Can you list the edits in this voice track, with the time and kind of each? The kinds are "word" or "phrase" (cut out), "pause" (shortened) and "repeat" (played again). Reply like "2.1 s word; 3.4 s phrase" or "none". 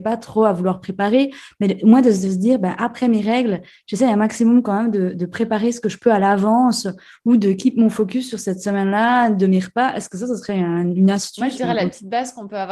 none